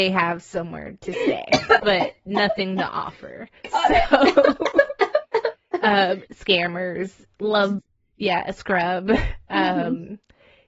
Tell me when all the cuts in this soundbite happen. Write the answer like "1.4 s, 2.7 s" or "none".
1.8 s, 3.6 s, 6.3 s, 7.8 s